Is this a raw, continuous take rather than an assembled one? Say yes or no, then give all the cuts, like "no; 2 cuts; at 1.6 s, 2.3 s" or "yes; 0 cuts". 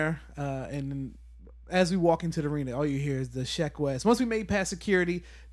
yes; 0 cuts